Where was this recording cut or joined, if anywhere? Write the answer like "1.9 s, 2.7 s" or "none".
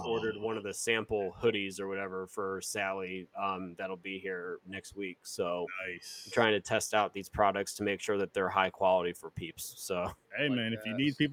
4.6 s